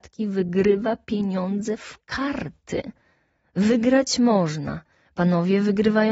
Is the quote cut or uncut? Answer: uncut